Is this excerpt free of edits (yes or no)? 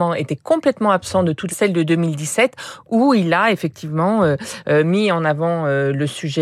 no